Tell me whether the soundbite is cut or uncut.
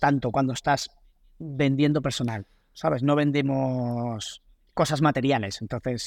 uncut